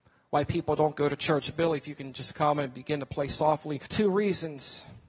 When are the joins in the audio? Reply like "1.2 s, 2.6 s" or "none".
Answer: 3.9 s